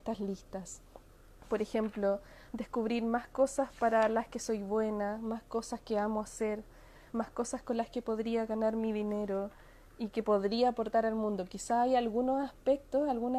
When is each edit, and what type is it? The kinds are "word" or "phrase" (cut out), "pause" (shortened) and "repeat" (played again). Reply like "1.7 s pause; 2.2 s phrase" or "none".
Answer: none

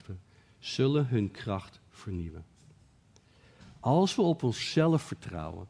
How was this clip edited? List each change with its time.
none

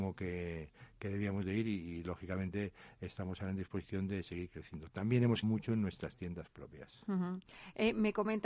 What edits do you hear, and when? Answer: 5.4 s word

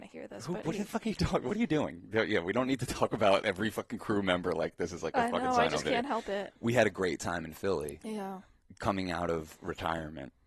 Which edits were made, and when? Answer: 6.6 s pause

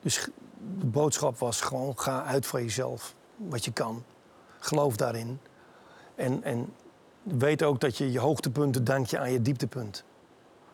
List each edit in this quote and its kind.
none

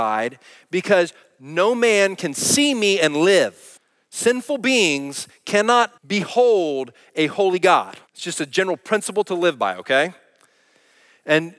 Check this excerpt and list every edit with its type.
3.8 s pause; 6.0 s pause; 8.1 s pause

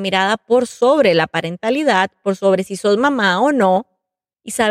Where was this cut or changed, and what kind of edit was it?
none

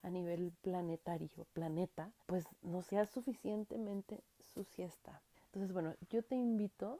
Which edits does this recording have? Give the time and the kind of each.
2.2 s pause; 2.9 s word; 5.3 s pause

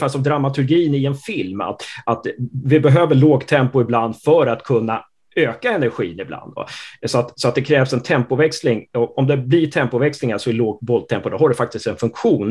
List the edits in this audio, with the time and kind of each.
none

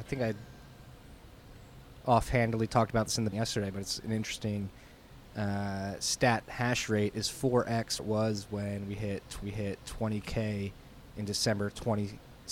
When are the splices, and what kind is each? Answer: 3.3 s word; 6.4 s phrase; 8.0 s word; 9.4 s repeat

